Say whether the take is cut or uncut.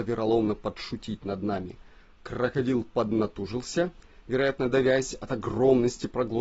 uncut